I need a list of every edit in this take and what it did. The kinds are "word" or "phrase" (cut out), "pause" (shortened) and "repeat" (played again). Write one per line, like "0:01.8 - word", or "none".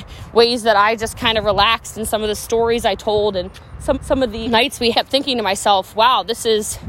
0:03.9 - repeat
0:04.4 - word
0:04.9 - phrase